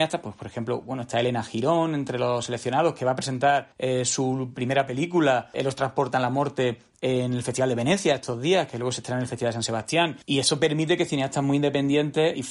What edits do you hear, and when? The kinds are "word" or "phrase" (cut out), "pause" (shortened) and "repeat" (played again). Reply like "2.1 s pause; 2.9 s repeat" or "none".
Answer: none